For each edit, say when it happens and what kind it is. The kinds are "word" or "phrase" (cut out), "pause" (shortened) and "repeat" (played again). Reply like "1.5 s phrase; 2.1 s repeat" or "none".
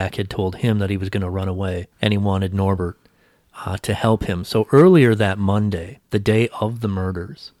1.9 s pause; 6.0 s pause